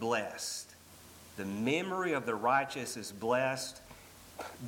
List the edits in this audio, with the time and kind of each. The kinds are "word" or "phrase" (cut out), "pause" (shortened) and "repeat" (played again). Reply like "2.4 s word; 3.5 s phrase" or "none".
0.9 s pause